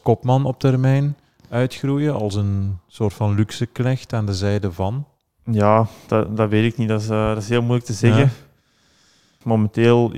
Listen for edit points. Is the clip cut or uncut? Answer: uncut